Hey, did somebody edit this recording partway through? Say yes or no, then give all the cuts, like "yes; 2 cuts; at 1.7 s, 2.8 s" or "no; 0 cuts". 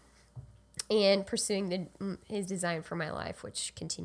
no; 0 cuts